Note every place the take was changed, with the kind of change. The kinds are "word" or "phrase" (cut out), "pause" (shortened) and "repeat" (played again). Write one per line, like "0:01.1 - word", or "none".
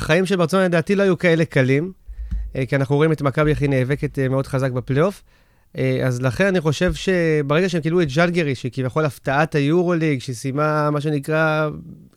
none

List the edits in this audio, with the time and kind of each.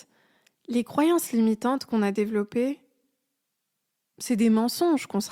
none

